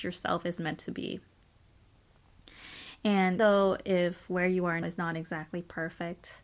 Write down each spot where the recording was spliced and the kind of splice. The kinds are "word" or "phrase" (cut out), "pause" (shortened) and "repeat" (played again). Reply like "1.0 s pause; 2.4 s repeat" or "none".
3.4 s word; 4.8 s word

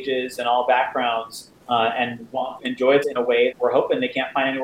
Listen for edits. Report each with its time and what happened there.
1.6 s pause; 2.6 s phrase; 3.0 s word; 3.5 s word

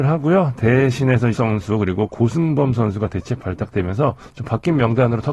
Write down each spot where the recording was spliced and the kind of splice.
1.3 s word

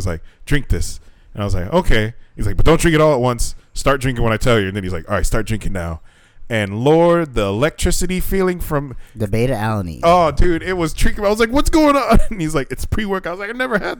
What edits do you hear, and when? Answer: none

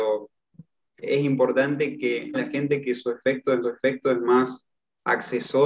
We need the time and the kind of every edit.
1.0 s word; 2.3 s phrase; 3.6 s repeat

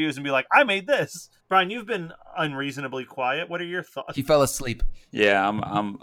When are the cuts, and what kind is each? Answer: none

